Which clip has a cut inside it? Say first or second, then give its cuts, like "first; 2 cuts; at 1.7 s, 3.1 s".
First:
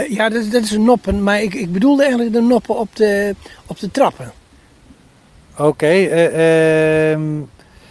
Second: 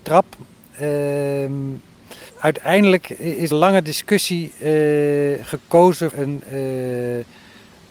second; 3 cuts; at 2.3 s, 3.5 s, 6.1 s